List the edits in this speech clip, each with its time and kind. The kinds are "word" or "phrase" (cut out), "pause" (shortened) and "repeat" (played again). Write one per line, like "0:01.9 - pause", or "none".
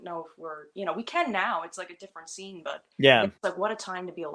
0:02.9 - pause
0:03.4 - pause